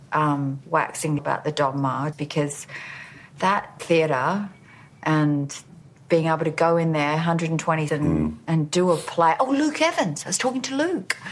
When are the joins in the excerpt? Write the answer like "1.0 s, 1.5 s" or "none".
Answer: 1.2 s, 2.1 s, 5.8 s, 7.9 s